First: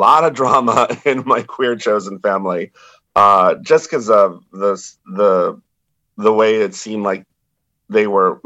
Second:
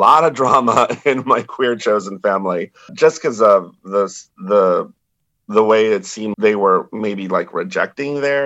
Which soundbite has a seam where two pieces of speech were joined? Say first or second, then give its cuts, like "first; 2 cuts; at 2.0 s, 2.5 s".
second; 2 cuts; at 2.9 s, 6.3 s